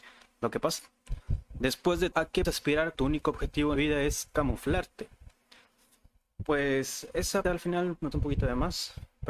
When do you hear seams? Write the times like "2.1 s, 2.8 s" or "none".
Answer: 2.1 s, 2.4 s, 2.9 s, 3.7 s, 7.4 s, 8.1 s